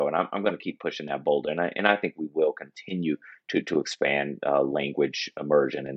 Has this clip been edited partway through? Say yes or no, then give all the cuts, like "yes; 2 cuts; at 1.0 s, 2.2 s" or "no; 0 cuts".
no; 0 cuts